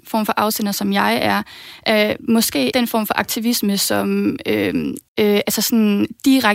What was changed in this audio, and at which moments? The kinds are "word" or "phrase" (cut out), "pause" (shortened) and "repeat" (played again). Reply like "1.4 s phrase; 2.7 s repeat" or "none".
2.7 s word; 5.1 s pause